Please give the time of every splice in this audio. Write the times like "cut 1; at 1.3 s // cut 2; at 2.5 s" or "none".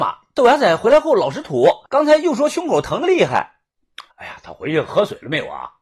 cut 1; at 1.9 s // cut 2; at 4.1 s